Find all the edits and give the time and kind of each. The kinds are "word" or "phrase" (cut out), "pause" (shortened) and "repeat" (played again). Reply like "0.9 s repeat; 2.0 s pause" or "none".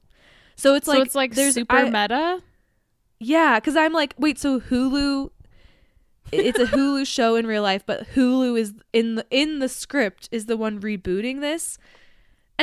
none